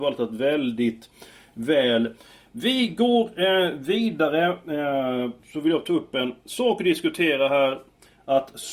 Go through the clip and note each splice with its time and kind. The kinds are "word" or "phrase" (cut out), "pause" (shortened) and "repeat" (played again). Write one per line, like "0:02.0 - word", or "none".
none